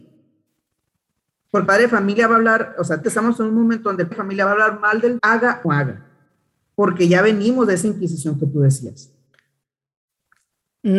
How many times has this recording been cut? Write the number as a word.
five